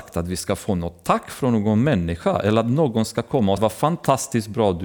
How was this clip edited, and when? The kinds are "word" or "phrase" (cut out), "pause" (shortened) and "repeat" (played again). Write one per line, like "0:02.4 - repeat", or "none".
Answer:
0:03.6 - word